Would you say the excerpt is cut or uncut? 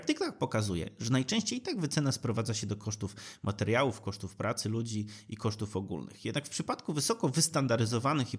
uncut